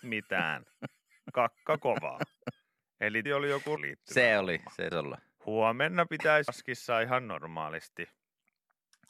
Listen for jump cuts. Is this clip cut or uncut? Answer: cut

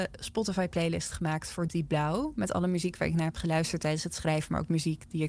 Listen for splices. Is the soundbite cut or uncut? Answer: cut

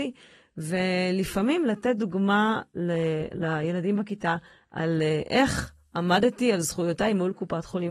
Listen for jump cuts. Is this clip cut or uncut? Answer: uncut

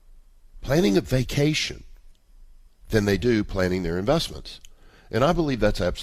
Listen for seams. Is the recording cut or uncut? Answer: uncut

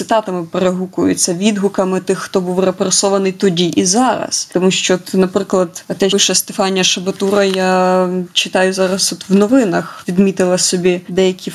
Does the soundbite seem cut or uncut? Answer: cut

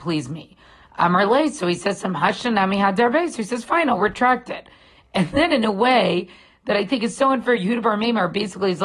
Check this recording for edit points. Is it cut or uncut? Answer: uncut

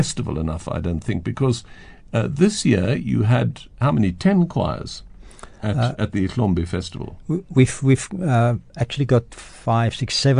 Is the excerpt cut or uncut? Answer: uncut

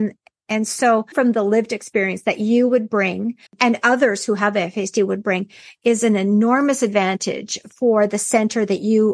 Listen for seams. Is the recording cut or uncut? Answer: cut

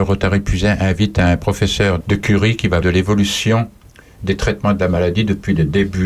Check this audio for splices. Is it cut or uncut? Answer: cut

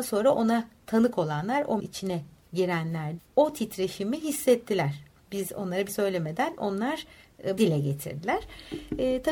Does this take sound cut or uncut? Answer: cut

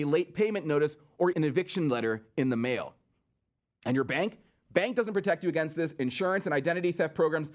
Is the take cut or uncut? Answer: cut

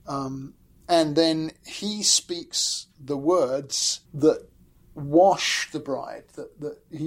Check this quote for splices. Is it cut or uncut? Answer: cut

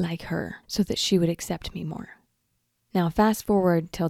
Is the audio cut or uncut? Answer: uncut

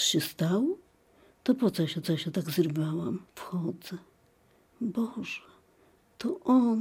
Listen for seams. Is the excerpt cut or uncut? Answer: cut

